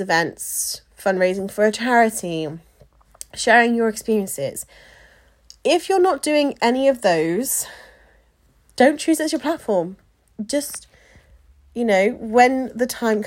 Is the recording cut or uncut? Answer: uncut